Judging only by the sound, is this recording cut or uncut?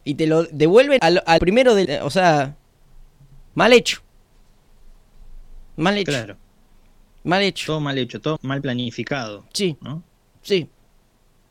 cut